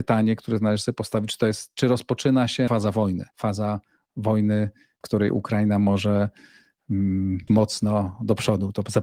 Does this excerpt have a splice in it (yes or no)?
yes